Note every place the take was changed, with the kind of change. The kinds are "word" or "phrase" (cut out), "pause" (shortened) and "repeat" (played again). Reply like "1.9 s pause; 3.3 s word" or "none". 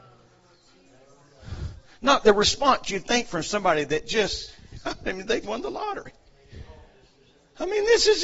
2.2 s word; 5.4 s word